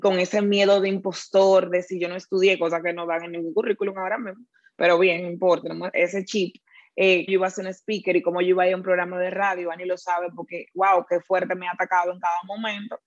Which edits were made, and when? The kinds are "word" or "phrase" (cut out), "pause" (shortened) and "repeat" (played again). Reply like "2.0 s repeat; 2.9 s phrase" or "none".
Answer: 5.6 s word; 5.9 s word; 7.3 s word

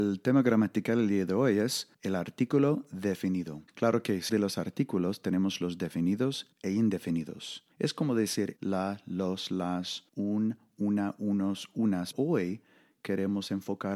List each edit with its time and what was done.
1.9 s pause; 3.7 s pause; 4.3 s word; 6.5 s pause; 7.7 s pause; 8.6 s word; 10.1 s pause; 12.1 s word

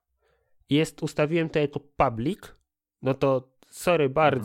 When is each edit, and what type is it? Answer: none

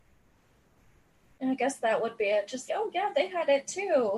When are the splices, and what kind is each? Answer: 2.7 s word

